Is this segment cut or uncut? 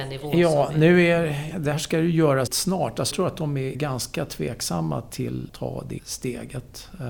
cut